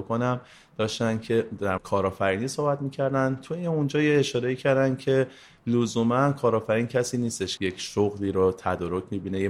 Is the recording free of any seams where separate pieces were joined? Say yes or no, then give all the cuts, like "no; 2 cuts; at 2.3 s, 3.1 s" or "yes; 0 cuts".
no; 2 cuts; at 1.8 s, 7.6 s